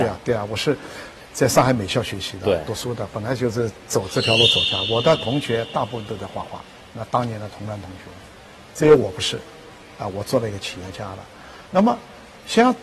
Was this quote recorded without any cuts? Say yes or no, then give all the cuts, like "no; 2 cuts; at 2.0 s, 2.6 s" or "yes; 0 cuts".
no; 1 cut; at 6.8 s